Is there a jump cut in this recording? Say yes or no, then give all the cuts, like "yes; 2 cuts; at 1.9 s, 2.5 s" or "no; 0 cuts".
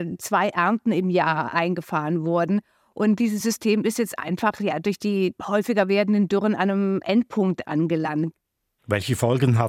no; 0 cuts